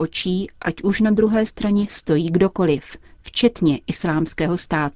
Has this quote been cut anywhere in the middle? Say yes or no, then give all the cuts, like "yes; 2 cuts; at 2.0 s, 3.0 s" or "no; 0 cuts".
no; 0 cuts